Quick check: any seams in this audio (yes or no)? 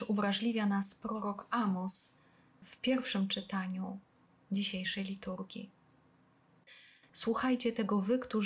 no